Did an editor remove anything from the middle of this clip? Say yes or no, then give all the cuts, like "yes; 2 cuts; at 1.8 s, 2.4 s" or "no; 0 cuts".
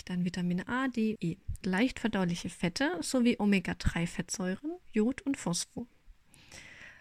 yes; 3 cuts; at 1.2 s, 1.6 s, 4.8 s